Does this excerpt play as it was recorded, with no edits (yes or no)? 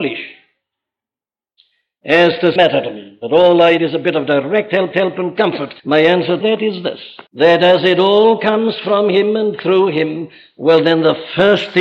no